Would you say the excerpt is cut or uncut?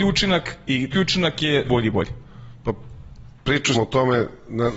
cut